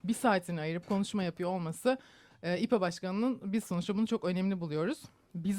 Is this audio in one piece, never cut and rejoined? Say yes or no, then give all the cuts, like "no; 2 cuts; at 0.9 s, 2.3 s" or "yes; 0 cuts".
yes; 0 cuts